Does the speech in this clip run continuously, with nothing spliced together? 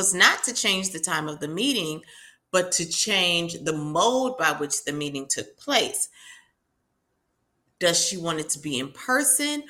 yes; 0 cuts

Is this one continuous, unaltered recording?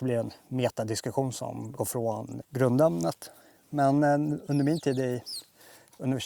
no; 2 cuts; at 1.8 s, 2.4 s

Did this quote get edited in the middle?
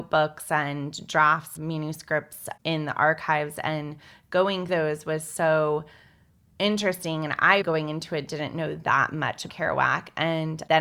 yes; 4 cuts; at 1.6 s, 4.7 s, 7.6 s, 9.5 s

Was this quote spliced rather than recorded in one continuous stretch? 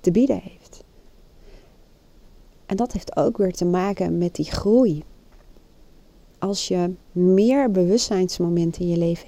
no; 0 cuts

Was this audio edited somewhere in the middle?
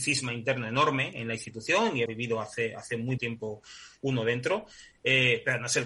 yes; 2 cuts; at 2.1 s, 3.2 s

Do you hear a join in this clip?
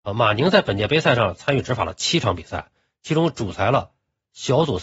no; 0 cuts

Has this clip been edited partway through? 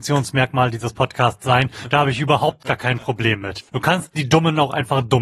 yes; 1 cut; at 3.7 s

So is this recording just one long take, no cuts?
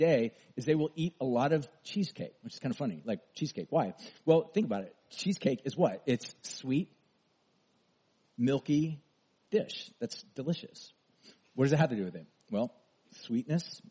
yes; 0 cuts

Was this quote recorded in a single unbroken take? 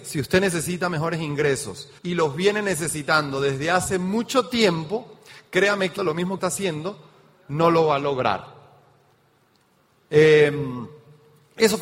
no; 3 cuts; at 2.0 s, 6.0 s, 6.4 s

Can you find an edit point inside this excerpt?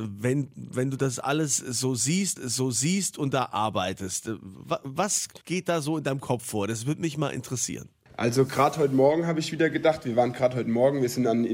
yes; 2 cuts; at 2.4 s, 5.4 s

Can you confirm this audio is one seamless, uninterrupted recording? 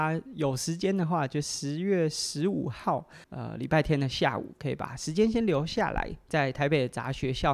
no; 1 cut; at 3.2 s

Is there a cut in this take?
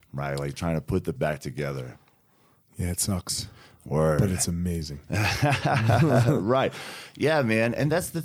yes; 1 cut; at 1.2 s

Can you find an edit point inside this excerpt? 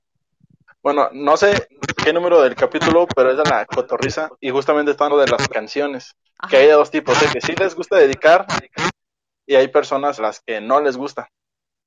yes; 6 cuts; at 4.4 s, 5.1 s, 5.5 s, 6.2 s, 7.3 s, 10.2 s

